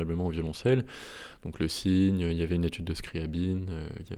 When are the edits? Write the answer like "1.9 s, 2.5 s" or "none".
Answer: none